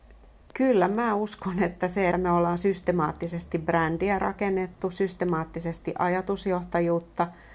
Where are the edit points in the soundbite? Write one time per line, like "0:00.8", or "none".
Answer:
0:02.1